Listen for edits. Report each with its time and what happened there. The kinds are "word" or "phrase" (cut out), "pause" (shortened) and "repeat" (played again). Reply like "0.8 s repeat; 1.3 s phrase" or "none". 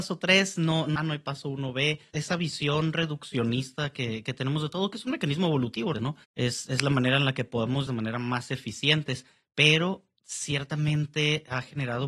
1.0 s phrase; 5.9 s word; 6.2 s pause; 7.9 s phrase